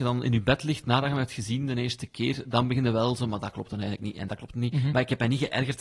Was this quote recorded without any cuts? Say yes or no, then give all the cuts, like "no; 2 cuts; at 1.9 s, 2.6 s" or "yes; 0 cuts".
yes; 0 cuts